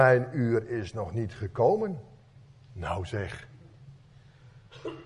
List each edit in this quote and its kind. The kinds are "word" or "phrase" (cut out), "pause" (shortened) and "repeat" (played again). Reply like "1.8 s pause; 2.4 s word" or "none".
2.5 s pause